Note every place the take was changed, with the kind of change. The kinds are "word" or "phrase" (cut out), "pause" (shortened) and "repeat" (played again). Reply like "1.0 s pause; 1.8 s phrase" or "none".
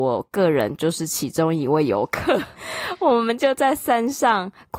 2.5 s pause